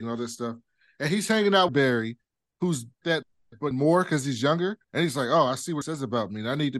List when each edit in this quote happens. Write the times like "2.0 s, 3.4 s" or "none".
1.7 s, 3.0 s, 3.7 s, 4.8 s, 5.8 s